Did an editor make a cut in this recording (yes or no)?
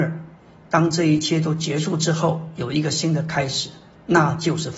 no